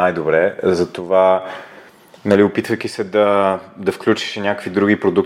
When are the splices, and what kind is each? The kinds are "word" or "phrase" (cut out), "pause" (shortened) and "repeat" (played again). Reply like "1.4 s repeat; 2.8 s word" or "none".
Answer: none